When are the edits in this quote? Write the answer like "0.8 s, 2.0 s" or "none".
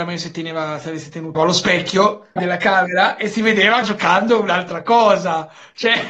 1.3 s, 2.4 s, 3.8 s